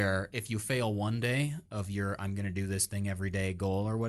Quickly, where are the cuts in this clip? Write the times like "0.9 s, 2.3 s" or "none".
none